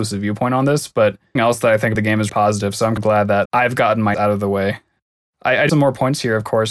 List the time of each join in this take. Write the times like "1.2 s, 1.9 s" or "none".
1.4 s, 2.0 s, 2.3 s, 3.0 s, 3.5 s, 4.1 s, 5.7 s

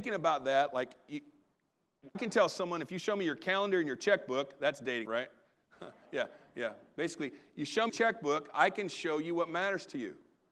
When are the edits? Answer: 2.1 s, 5.0 s, 7.9 s

